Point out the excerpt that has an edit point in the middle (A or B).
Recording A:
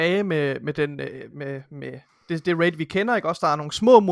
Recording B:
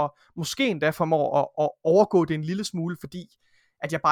A